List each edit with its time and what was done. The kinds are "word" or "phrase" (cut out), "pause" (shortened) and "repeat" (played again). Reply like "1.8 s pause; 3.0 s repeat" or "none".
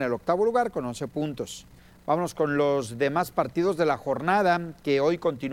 1.8 s pause